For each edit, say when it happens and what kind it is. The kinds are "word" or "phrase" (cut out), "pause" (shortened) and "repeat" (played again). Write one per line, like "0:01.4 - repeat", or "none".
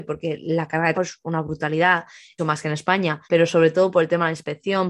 0:00.9 - word
0:02.4 - word
0:03.2 - pause